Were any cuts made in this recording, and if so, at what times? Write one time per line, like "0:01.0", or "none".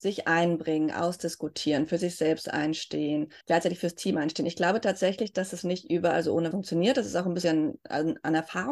0:03.4
0:06.5
0:07.4